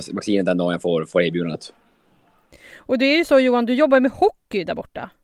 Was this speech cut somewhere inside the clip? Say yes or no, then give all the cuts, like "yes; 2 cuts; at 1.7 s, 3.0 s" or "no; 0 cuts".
no; 0 cuts